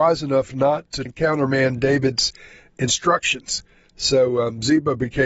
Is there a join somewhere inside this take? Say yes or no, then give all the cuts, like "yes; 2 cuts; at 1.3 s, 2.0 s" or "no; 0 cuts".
yes; 1 cut; at 1.1 s